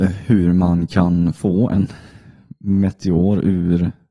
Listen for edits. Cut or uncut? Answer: uncut